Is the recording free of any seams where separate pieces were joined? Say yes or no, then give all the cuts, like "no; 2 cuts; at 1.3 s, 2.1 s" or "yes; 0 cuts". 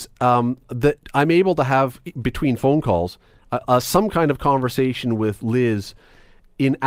yes; 0 cuts